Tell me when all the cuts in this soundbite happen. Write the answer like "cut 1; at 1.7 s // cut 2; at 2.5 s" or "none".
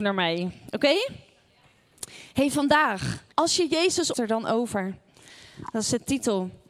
cut 1; at 3.3 s // cut 2; at 4.1 s

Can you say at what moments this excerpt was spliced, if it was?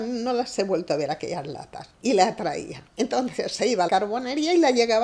cut 1; at 1.9 s // cut 2; at 2.9 s // cut 3; at 3.9 s

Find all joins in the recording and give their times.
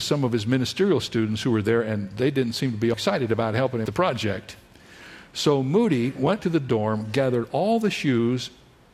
cut 1; at 2.9 s // cut 2; at 3.9 s // cut 3; at 6.4 s

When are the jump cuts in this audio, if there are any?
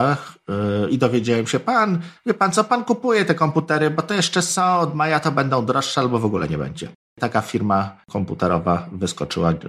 cut 1; at 7.0 s

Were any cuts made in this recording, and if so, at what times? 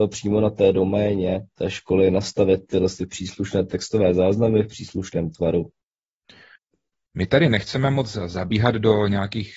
none

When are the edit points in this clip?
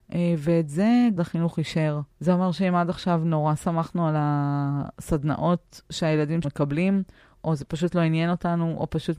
cut 1; at 1.2 s // cut 2; at 2.1 s // cut 3; at 6.4 s

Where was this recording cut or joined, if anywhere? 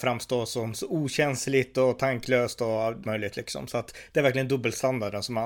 cut 1; at 3.0 s

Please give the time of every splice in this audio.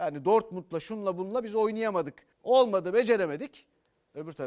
cut 1; at 2.3 s

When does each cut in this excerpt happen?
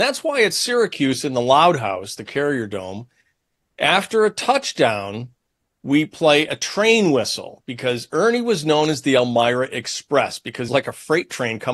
cut 1; at 10.7 s

